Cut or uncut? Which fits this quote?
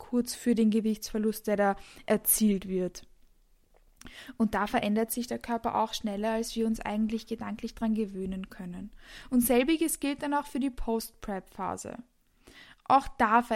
uncut